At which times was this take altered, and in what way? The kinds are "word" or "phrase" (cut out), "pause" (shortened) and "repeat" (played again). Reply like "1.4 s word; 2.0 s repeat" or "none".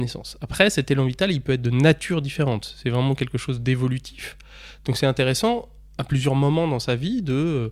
none